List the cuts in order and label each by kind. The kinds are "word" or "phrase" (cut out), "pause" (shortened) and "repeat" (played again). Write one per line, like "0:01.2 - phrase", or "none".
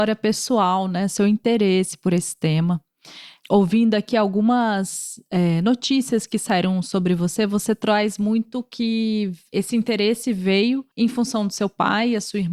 0:10.9 - pause